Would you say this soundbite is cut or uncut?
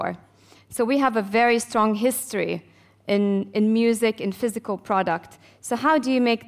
uncut